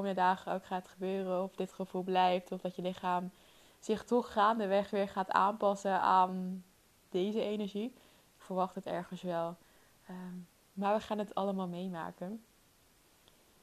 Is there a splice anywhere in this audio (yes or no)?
no